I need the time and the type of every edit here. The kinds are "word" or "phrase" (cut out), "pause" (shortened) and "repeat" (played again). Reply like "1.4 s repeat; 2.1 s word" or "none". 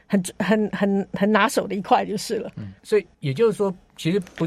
2.8 s pause; 3.1 s pause